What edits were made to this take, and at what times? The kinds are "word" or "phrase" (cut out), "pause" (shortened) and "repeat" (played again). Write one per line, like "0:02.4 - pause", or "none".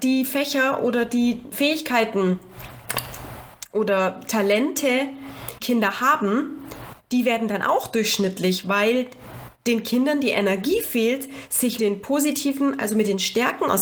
0:01.5 - word
0:05.6 - word
0:11.8 - word